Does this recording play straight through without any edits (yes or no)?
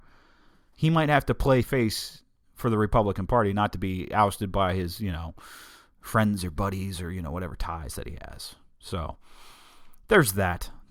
no